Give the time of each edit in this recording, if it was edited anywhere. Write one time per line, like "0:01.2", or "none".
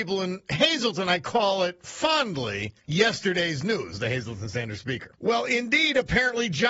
0:02.8
0:05.1